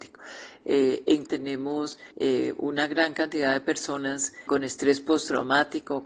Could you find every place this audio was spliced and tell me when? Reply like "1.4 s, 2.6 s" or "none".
1.3 s, 2.1 s, 4.5 s